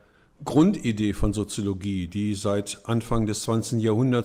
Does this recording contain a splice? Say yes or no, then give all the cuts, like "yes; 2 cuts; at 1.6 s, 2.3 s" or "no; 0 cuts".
no; 0 cuts